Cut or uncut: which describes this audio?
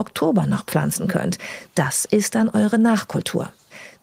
uncut